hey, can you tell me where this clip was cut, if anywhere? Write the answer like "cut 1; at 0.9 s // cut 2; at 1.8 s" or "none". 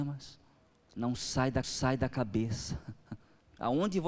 cut 1; at 1.6 s